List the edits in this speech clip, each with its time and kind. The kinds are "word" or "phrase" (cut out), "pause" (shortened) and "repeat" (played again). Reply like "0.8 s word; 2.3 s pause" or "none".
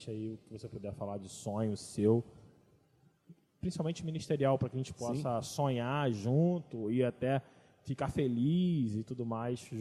none